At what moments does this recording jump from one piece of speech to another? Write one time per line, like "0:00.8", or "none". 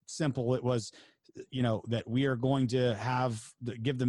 none